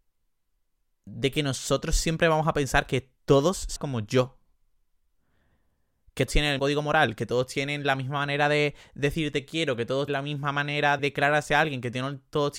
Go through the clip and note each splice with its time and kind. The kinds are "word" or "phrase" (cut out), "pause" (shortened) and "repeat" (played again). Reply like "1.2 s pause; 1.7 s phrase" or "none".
3.2 s pause; 3.8 s phrase; 6.3 s word; 6.6 s word; 10.1 s word; 11.0 s word